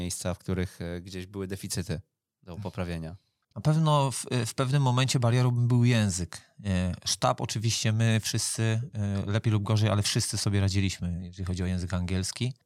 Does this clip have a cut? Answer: no; 0 cuts

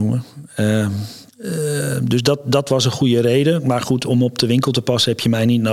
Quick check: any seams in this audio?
yes; 1 cut; at 1.3 s

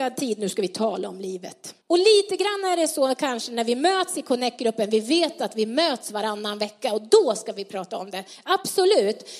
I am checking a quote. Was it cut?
yes; 1 cut; at 1.8 s

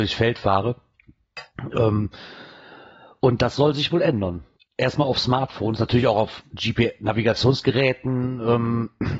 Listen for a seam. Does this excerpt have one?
yes; 1 cut; at 4.6 s

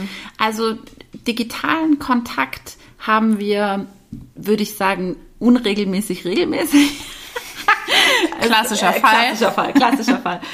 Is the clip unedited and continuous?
no; 1 cut; at 4.3 s

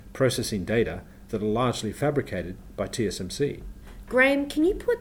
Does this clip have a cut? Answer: yes; 1 cut; at 1.3 s

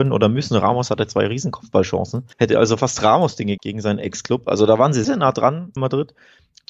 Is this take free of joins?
no; 4 cuts; at 2.3 s, 3.6 s, 5.0 s, 5.8 s

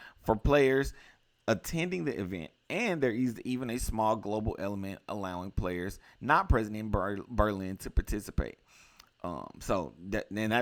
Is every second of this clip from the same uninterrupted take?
yes; 0 cuts

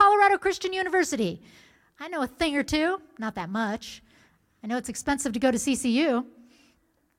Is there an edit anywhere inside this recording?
no; 0 cuts

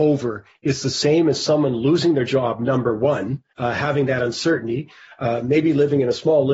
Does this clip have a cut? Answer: yes; 1 cut; at 3.5 s

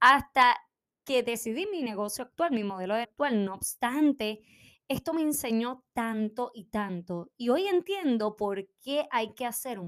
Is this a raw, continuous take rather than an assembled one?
no; 1 cut; at 3.0 s

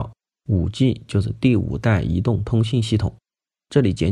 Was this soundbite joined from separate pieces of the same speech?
no; 0 cuts

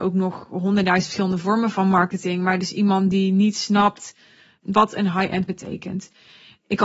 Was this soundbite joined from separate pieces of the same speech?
yes; 1 cut; at 5.5 s

